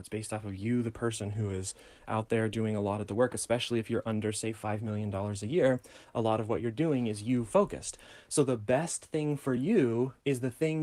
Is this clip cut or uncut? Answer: uncut